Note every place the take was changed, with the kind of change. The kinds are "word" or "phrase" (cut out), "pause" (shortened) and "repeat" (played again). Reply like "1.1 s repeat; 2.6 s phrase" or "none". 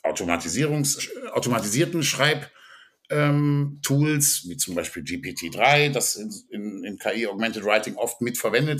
1.0 s word